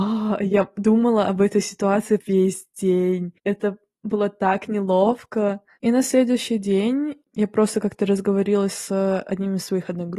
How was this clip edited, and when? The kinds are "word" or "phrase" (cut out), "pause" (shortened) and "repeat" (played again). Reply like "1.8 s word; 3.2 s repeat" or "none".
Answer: 2.2 s word; 3.4 s pause